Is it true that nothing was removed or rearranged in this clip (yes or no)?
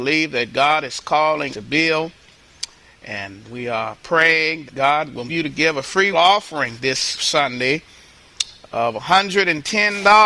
no